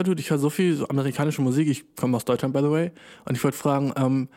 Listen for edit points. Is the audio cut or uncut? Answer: uncut